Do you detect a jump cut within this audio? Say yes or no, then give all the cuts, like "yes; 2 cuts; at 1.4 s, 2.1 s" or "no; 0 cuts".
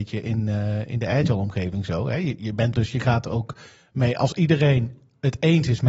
yes; 1 cut; at 2.7 s